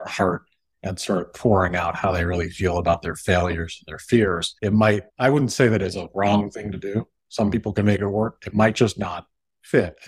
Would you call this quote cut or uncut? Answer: cut